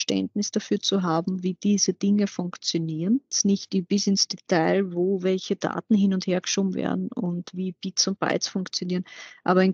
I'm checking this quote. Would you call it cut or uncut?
uncut